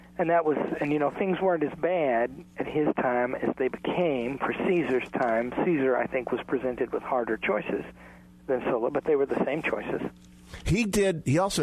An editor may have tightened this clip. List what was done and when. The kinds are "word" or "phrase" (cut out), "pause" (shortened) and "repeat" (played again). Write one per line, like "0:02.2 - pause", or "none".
none